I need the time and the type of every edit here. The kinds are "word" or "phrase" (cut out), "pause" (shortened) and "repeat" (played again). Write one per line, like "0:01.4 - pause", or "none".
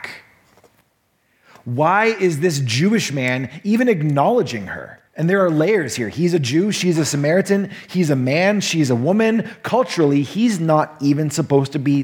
0:05.1 - pause